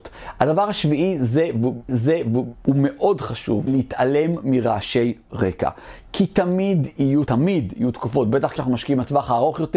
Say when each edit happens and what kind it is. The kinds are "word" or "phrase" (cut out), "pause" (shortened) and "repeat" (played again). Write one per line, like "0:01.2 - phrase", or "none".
0:01.9 - repeat
0:03.7 - phrase
0:07.3 - word
0:08.6 - word